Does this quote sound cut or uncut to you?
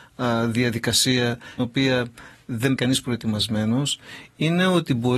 cut